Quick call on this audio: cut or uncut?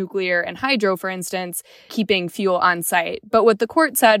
cut